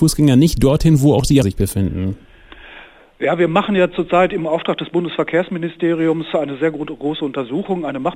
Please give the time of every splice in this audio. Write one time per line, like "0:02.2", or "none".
0:01.4